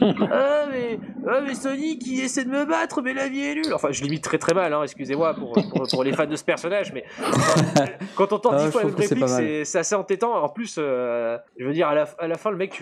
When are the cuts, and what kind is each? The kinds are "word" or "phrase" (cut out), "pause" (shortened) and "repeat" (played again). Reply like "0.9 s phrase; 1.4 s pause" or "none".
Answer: 11.5 s pause